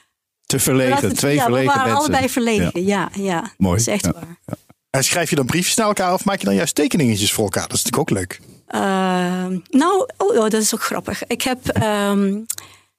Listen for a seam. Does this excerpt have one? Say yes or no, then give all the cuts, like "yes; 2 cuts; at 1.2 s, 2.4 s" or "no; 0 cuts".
no; 0 cuts